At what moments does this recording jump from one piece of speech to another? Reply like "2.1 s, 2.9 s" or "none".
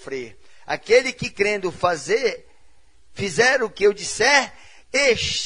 none